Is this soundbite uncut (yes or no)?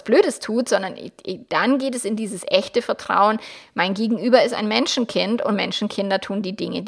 yes